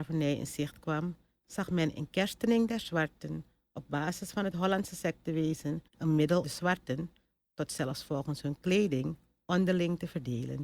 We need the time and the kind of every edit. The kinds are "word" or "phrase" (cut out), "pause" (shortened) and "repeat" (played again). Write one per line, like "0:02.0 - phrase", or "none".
0:05.9 - pause
0:06.4 - word